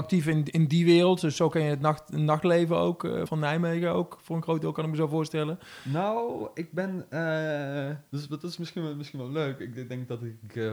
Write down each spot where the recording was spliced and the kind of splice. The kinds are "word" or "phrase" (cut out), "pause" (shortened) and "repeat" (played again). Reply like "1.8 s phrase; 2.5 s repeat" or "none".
3.3 s word